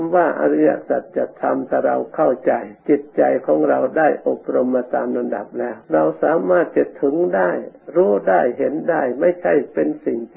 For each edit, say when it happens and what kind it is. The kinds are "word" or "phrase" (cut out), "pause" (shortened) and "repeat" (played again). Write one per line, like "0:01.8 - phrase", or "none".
0:02.8 - pause
0:05.8 - pause